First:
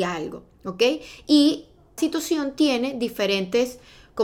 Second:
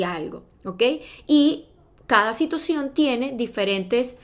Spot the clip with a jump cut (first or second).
first